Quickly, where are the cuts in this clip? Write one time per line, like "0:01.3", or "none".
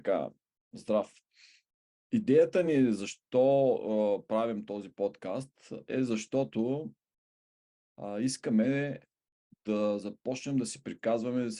none